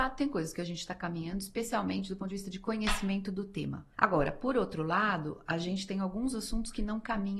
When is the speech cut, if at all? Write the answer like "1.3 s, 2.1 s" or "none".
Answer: 3.9 s